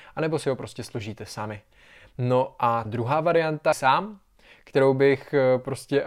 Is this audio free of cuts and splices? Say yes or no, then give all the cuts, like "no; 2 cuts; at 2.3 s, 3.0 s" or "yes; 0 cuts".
no; 2 cuts; at 2.9 s, 3.7 s